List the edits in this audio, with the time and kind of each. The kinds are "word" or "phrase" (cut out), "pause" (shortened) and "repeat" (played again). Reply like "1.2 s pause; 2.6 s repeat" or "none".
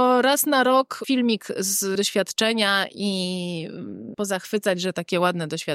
1.0 s word; 2.0 s word; 4.1 s word